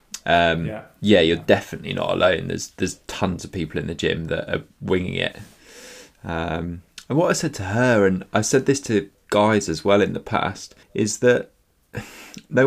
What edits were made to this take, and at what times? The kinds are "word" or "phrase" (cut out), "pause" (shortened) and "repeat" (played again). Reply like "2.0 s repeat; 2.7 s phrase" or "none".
9.1 s pause; 10.8 s pause